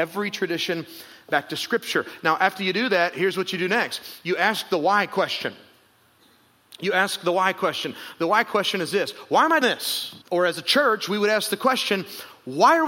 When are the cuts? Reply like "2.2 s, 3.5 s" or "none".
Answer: 9.6 s, 10.2 s